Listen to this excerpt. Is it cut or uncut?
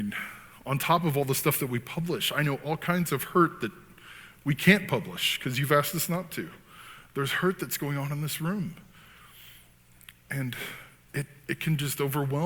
uncut